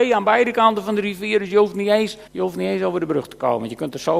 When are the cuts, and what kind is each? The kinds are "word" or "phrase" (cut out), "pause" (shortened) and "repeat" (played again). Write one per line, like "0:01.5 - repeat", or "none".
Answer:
0:02.3 - pause

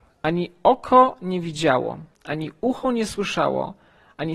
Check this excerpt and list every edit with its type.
0:02.1 - pause

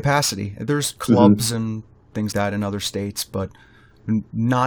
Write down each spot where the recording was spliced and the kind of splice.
0:02.3 - word

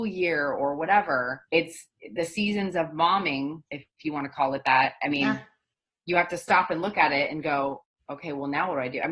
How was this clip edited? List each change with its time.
0:01.5 - pause
0:03.7 - pause

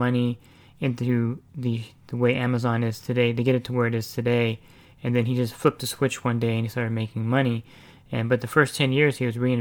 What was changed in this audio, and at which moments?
none

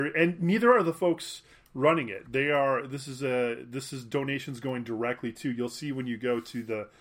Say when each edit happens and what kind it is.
none

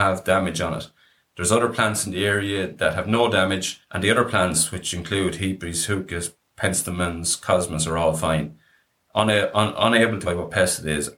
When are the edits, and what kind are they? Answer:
0:10.3 - word

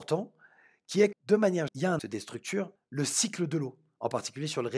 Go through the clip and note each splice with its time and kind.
0:01.1 - word
0:01.7 - word
0:02.0 - word
0:02.8 - word

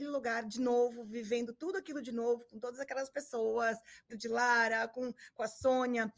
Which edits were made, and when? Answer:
0:04.1 - phrase

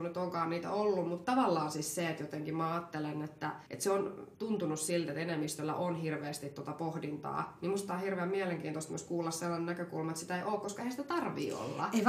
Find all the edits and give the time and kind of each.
0:03.7 - pause
0:04.3 - pause

